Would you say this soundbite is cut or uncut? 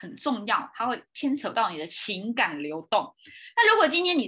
uncut